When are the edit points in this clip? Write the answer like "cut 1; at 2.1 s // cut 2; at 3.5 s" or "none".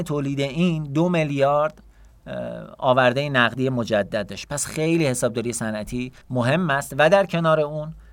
cut 1; at 6.2 s